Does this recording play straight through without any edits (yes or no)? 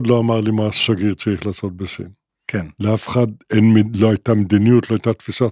no